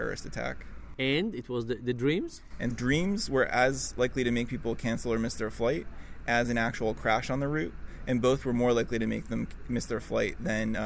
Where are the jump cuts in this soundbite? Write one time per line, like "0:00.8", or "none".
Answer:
0:02.7